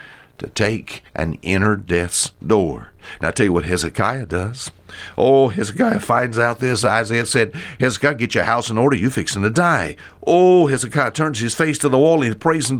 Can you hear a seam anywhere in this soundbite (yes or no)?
yes